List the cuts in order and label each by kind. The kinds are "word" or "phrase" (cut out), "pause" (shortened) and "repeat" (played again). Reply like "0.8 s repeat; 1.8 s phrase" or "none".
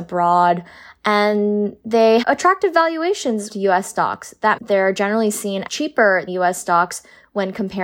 2.2 s word; 3.5 s word; 4.6 s word; 5.7 s word; 6.3 s word